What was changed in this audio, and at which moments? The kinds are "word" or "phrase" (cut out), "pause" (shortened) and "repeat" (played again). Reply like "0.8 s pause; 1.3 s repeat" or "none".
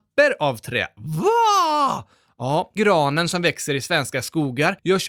2.8 s word